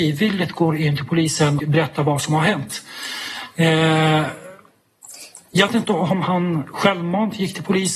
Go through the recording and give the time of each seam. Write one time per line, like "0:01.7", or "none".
0:01.6
0:05.7